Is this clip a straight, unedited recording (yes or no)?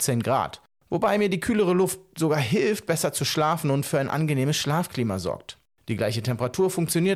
yes